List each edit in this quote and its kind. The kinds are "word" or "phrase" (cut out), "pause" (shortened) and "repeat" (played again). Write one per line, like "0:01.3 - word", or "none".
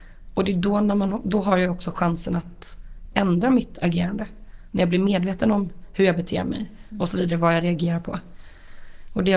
none